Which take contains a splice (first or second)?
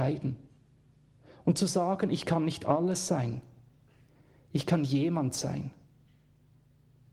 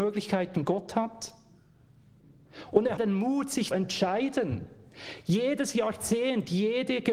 second